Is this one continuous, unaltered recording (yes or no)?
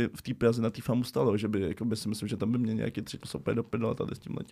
no